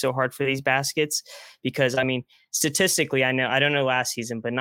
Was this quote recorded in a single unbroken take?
yes; 0 cuts

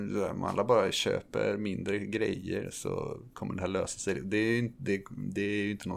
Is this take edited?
no; 0 cuts

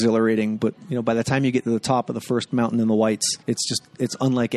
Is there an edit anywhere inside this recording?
yes; 1 cut; at 3.4 s

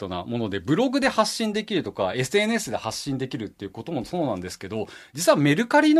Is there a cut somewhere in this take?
no; 0 cuts

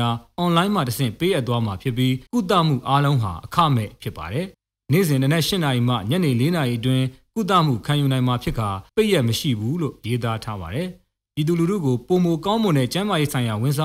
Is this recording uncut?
no; 3 cuts; at 2.3 s, 4.5 s, 8.9 s

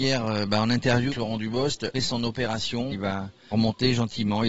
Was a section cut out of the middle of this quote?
yes; 4 cuts; at 1.1 s, 1.9 s, 2.9 s, 3.5 s

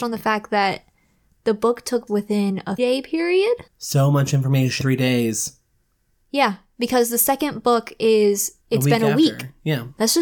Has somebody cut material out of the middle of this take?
yes; 5 cuts; at 2.1 s, 2.8 s, 3.7 s, 4.8 s, 8.6 s

